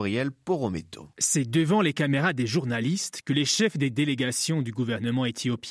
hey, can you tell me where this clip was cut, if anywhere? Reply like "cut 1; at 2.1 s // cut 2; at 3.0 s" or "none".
cut 1; at 1.1 s

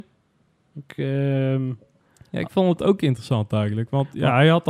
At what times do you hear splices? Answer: none

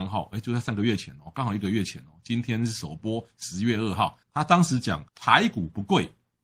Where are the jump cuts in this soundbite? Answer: cut 1; at 4.2 s // cut 2; at 5.1 s

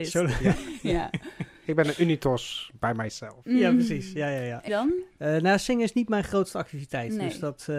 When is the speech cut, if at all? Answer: cut 1; at 4.7 s

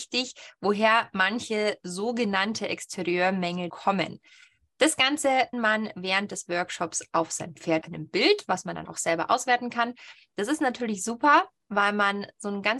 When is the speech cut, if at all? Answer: cut 1; at 3.7 s // cut 2; at 5.5 s // cut 3; at 7.8 s // cut 4; at 8.9 s

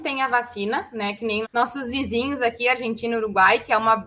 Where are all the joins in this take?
cut 1; at 1.4 s

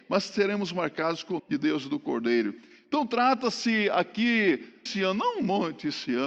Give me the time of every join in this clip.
cut 1; at 1.4 s // cut 2; at 4.9 s

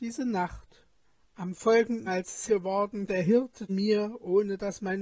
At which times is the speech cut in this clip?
cut 1; at 1.0 s // cut 2; at 2.1 s // cut 3; at 2.5 s // cut 4; at 3.1 s // cut 5; at 3.7 s

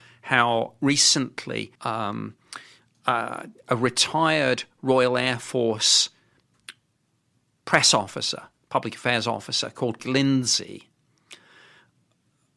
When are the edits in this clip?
cut 1; at 1.8 s // cut 2; at 3.6 s // cut 3; at 10.0 s

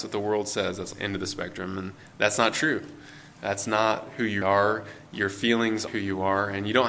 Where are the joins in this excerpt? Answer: cut 1; at 0.9 s // cut 2; at 4.4 s // cut 3; at 5.9 s

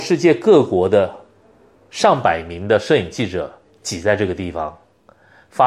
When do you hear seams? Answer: none

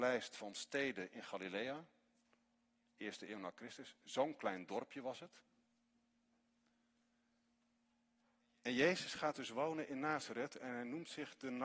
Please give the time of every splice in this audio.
none

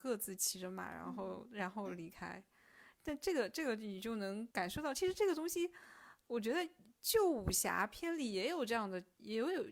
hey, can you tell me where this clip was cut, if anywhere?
cut 1; at 4.5 s

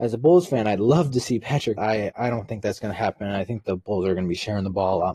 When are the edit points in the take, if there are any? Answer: cut 1; at 1.8 s

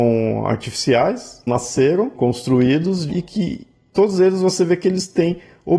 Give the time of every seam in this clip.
cut 1; at 1.5 s // cut 2; at 2.1 s // cut 3; at 3.1 s

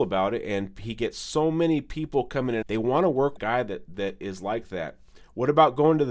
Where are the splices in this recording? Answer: cut 1; at 2.6 s // cut 2; at 3.4 s

